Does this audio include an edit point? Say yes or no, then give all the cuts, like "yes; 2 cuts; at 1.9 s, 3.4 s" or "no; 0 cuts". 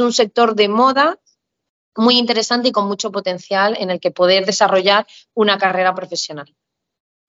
no; 0 cuts